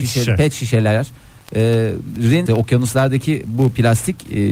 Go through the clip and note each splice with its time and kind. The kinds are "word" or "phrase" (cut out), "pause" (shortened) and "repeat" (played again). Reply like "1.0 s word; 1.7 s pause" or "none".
2.5 s word